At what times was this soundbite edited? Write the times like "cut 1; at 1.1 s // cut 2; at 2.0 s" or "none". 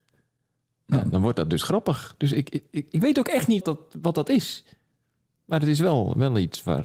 cut 1; at 3.6 s